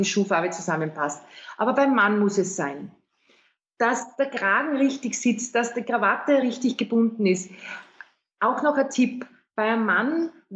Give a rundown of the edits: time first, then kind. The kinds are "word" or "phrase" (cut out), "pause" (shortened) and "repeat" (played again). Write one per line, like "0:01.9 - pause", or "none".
none